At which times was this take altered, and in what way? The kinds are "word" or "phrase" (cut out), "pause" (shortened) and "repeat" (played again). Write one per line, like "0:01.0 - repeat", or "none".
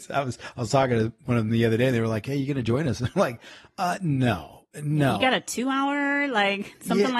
none